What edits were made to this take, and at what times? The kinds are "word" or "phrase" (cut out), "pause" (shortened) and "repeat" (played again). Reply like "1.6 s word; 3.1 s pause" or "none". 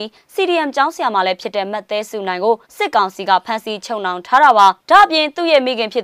2.7 s pause; 4.8 s pause